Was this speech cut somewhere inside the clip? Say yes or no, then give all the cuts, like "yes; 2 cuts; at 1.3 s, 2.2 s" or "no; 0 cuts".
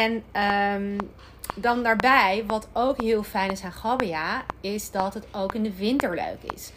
no; 0 cuts